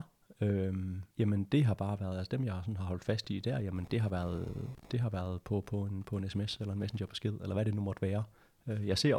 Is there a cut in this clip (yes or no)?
yes